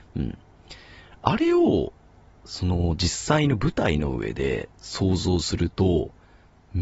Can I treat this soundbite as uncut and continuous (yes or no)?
yes